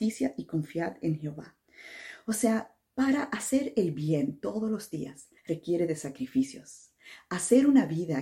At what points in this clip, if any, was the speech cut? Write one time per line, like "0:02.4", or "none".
0:05.4